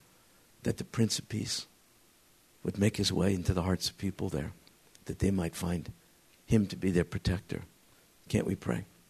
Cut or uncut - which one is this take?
uncut